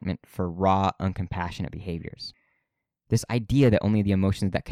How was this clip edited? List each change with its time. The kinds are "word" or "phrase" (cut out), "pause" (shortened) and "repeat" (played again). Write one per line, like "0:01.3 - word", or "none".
none